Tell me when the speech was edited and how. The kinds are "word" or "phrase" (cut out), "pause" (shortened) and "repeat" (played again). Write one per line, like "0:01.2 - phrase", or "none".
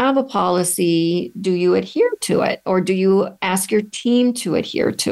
none